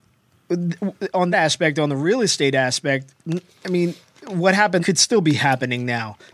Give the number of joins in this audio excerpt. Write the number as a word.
three